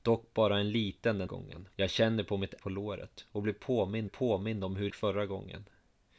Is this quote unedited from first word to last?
no; 5 cuts; at 1.3 s, 1.7 s, 2.6 s, 4.1 s, 4.9 s

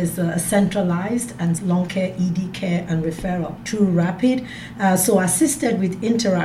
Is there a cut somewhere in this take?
yes; 3 cuts; at 1.6 s, 1.9 s, 3.6 s

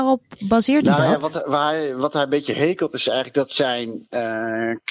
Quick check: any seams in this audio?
no; 0 cuts

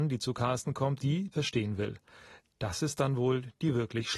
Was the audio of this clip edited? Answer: yes; 2 cuts; at 1.0 s, 1.3 s

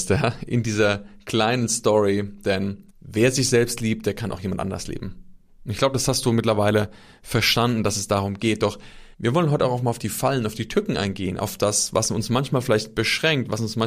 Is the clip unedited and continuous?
no; 2 cuts; at 2.9 s, 9.1 s

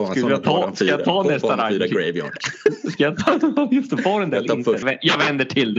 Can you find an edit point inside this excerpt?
yes; 1 cut; at 4.8 s

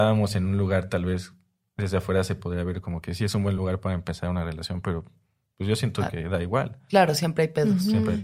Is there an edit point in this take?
no; 0 cuts

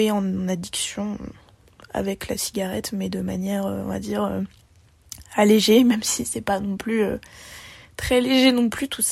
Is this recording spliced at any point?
no; 0 cuts

